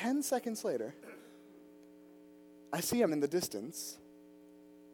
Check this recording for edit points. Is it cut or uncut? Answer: cut